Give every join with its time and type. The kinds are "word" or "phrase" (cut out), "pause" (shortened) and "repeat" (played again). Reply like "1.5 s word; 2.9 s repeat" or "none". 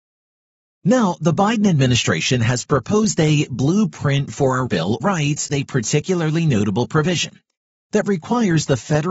4.7 s word; 5.0 s word; 5.5 s word